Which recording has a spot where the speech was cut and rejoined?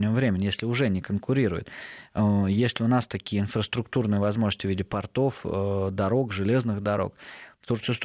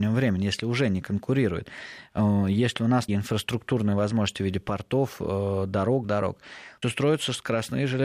second; 3 cuts; at 3.1 s, 6.0 s, 6.8 s

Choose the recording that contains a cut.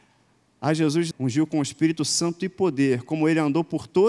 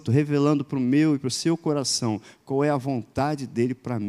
first; 1 cut; at 1.1 s

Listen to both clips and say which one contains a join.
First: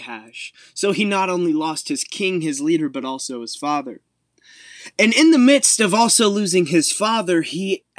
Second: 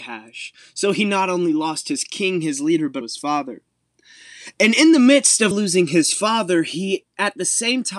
second; 2 cuts; at 3.0 s, 5.5 s

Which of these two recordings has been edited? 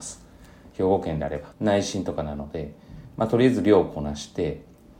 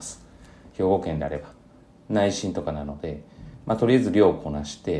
first; 1 cut; at 1.5 s

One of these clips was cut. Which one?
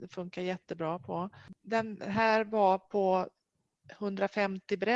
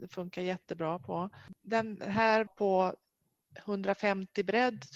second; 1 cut; at 2.5 s

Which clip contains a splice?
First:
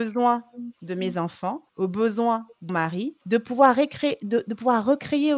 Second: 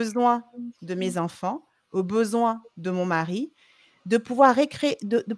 first; 3 cuts; at 1.7 s, 2.7 s, 3.2 s

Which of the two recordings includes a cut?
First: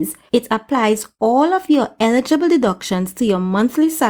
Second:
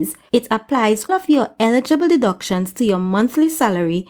second; 1 cut; at 1.1 s

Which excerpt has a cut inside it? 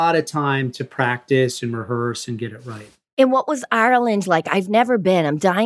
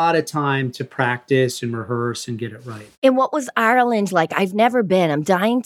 second; 1 cut; at 3.0 s

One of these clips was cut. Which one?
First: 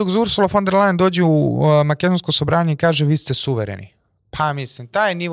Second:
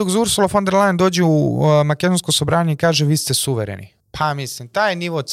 second; 1 cut; at 4.0 s

